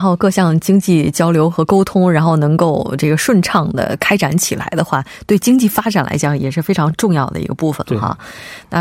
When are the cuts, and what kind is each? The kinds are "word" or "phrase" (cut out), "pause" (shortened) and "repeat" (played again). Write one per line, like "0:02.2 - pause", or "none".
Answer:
none